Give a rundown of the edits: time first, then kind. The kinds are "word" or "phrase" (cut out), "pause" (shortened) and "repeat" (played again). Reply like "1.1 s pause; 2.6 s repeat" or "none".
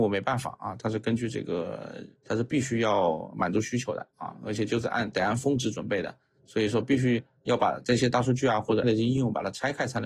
8.8 s word